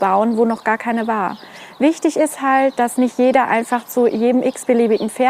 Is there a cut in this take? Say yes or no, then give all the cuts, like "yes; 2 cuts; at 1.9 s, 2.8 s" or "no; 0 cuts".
no; 0 cuts